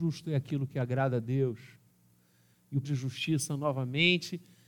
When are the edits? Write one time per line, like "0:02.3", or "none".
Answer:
0:02.8